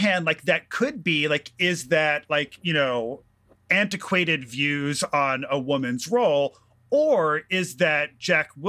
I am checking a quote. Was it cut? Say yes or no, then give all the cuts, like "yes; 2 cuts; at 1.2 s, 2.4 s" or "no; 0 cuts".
no; 0 cuts